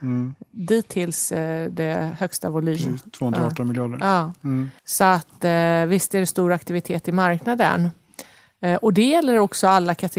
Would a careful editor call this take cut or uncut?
cut